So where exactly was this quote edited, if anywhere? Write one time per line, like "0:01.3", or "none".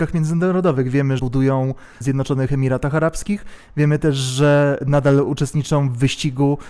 0:01.2
0:02.0